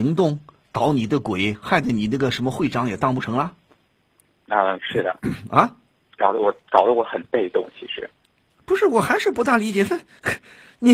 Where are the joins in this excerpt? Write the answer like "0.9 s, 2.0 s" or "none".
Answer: 4.8 s